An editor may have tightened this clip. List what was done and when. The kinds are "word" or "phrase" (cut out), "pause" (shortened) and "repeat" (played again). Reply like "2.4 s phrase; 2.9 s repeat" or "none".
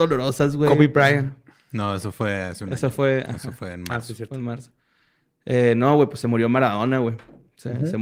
none